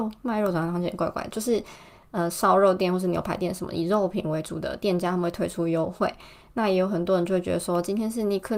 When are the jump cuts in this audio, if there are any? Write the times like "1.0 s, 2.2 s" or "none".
none